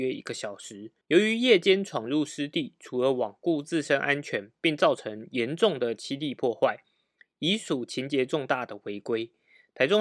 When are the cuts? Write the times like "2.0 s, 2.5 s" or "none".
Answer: 1.0 s